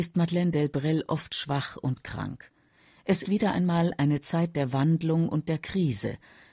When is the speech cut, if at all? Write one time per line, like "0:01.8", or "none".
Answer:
0:03.2